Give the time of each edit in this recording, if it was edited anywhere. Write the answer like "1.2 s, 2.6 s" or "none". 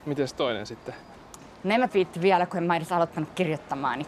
1.9 s